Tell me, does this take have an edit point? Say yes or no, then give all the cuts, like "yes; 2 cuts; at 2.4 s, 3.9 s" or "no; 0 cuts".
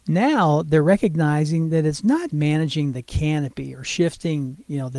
yes; 1 cut; at 2.3 s